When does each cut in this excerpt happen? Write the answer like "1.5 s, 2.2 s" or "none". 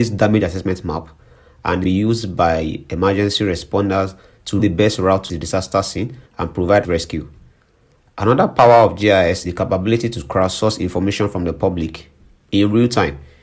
1.8 s, 4.6 s, 5.3 s, 6.3 s, 6.8 s, 9.4 s

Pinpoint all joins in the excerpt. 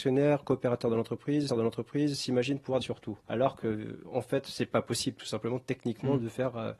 1.5 s, 2.8 s, 3.2 s

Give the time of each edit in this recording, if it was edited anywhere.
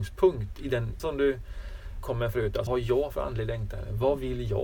1.0 s, 2.0 s, 2.7 s

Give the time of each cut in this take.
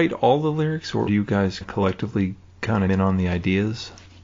1.1 s, 1.6 s, 2.9 s

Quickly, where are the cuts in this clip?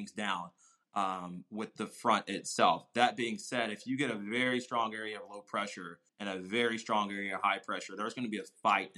6.1 s

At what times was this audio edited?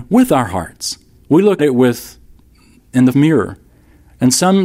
1.6 s, 3.1 s

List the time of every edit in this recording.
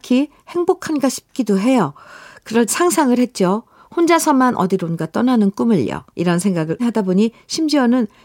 2.7 s, 6.1 s, 6.8 s

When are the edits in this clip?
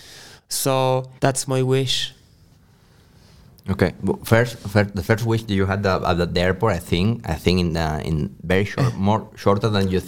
1.2 s

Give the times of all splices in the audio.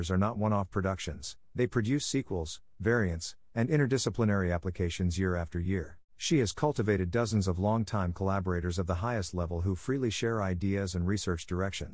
6.1 s

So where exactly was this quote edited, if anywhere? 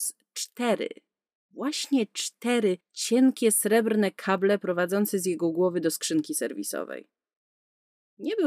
none

